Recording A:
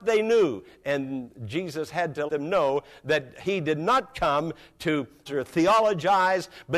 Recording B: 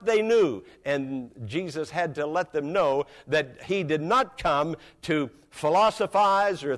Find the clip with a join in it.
A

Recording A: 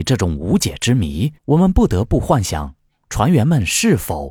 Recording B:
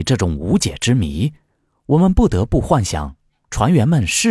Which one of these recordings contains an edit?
A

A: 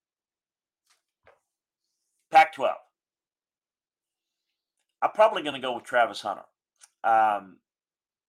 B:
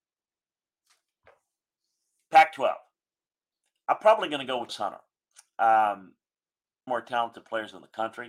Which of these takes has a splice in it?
B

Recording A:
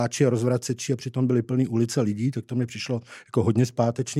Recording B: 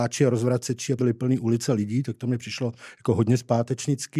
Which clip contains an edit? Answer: B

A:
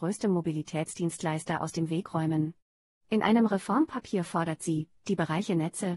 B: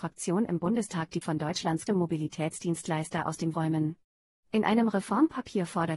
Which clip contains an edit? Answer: B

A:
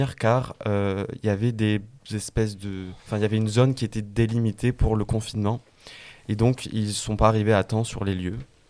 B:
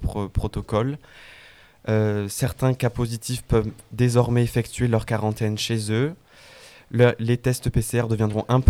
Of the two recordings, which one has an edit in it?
A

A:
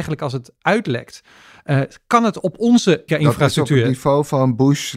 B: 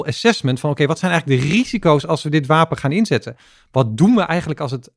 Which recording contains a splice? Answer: A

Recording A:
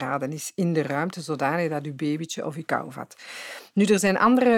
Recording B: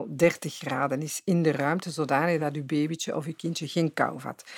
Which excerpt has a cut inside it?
A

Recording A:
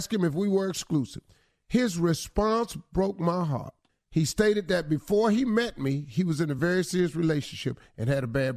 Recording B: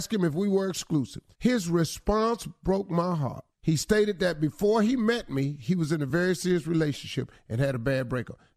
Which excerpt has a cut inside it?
B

